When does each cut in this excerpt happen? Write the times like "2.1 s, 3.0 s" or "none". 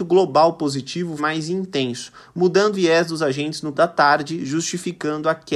1.2 s, 2.7 s, 3.7 s

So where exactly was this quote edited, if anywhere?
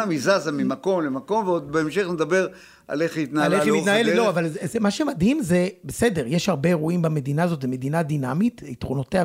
none

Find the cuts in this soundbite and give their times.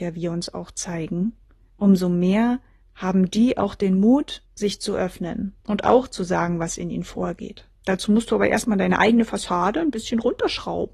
1.4 s, 2.8 s, 4.4 s, 5.6 s, 7.7 s

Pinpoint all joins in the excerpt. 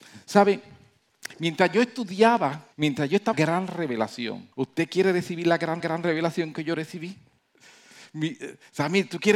2.7 s, 3.3 s, 4.5 s, 5.8 s

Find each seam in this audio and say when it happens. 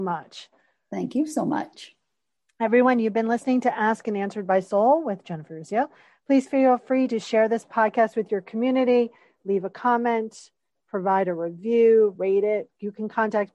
none

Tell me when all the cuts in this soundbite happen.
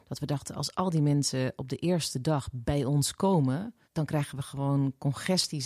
3.8 s

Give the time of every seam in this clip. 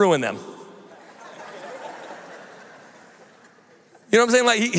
none

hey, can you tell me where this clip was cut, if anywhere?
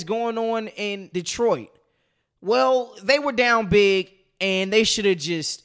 1.1 s

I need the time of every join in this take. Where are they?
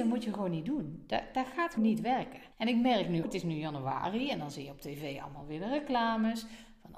1.8 s, 2.5 s, 3.2 s

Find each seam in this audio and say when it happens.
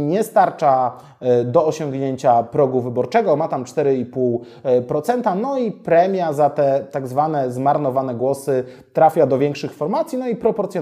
none

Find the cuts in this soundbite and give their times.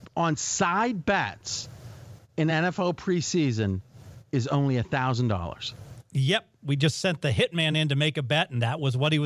none

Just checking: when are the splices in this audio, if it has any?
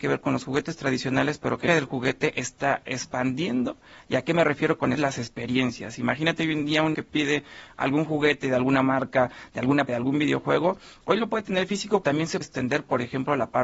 1.7 s, 4.9 s, 6.9 s, 9.9 s, 12.0 s, 12.4 s

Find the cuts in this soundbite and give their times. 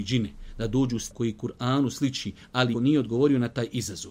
1.1 s, 2.7 s

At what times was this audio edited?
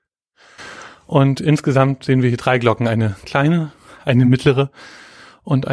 none

